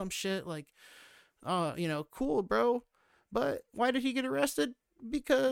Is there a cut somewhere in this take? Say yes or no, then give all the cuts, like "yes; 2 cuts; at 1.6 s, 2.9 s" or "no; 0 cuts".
no; 0 cuts